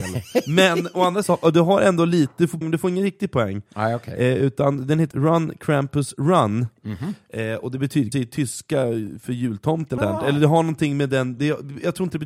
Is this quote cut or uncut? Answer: cut